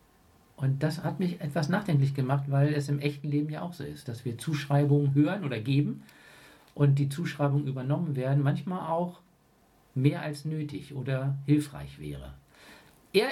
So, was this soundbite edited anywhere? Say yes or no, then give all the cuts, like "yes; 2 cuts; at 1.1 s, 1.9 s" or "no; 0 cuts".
no; 0 cuts